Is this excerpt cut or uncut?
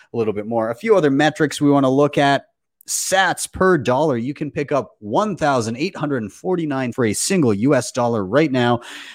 cut